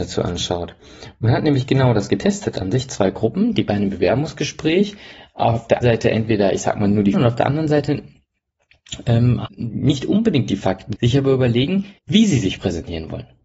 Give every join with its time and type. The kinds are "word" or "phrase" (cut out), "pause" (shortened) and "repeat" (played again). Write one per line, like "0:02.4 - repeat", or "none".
0:05.8 - word
0:07.1 - phrase
0:09.5 - word
0:11.0 - word
0:12.0 - pause